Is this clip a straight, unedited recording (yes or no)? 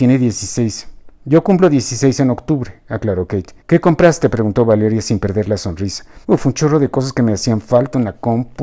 no